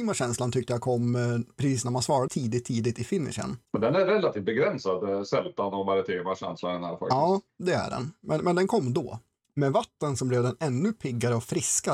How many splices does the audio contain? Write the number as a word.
one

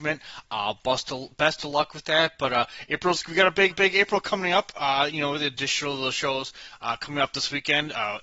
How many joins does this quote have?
one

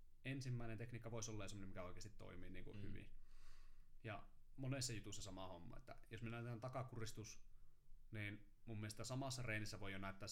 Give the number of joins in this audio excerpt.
zero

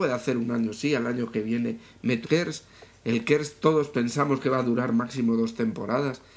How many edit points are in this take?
one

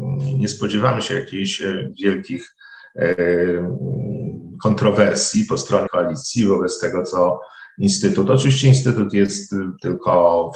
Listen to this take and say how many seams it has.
one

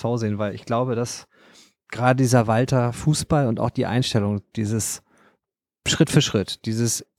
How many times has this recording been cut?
zero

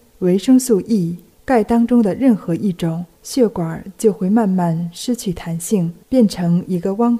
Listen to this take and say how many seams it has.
three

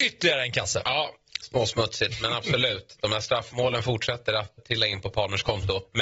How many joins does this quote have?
one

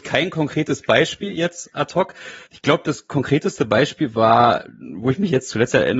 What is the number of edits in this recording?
one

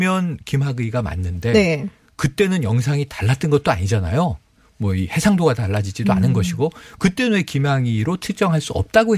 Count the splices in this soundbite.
zero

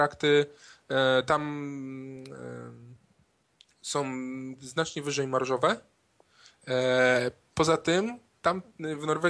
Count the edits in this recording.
one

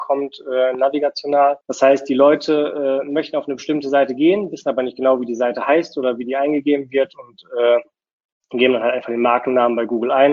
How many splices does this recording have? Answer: one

